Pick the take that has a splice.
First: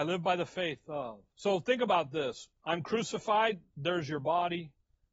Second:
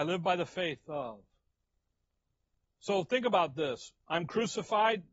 first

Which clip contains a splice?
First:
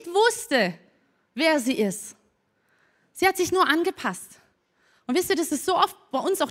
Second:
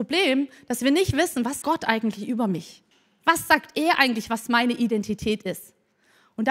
second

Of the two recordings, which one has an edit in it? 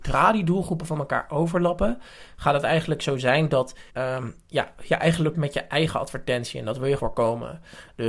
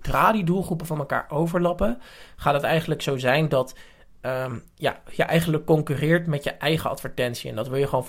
first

